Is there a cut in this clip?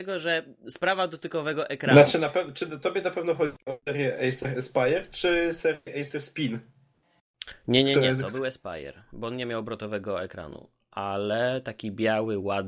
no; 0 cuts

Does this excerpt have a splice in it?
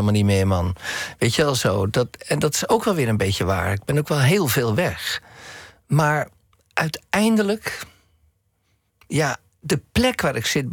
no; 0 cuts

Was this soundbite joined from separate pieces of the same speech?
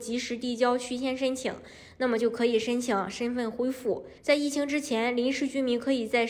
yes; 1 cut; at 4.2 s

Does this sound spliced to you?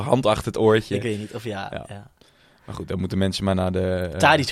no; 0 cuts

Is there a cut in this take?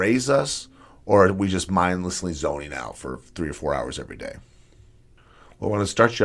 no; 0 cuts

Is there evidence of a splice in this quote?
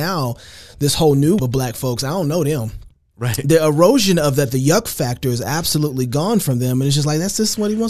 yes; 1 cut; at 1.4 s

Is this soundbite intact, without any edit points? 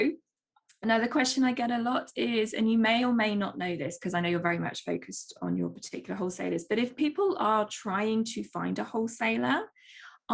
yes; 0 cuts

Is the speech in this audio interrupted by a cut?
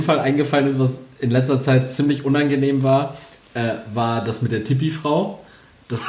no; 0 cuts

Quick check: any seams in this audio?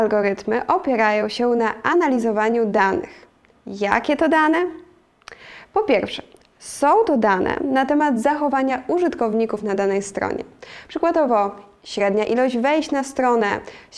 no; 0 cuts

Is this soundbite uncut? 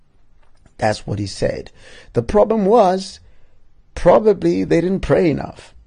yes; 0 cuts

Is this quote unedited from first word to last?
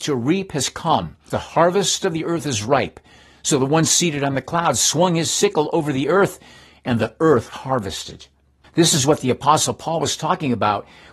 no; 2 cuts; at 1.3 s, 7.5 s

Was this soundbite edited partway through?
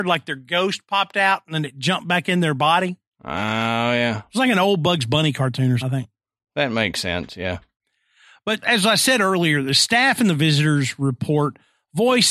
yes; 2 cuts; at 5.8 s, 8.6 s

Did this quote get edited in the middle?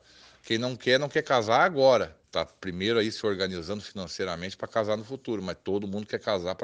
yes; 1 cut; at 2.2 s

